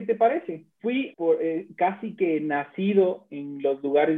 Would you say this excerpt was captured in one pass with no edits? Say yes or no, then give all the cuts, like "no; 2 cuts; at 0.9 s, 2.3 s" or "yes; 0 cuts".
no; 1 cut; at 1.1 s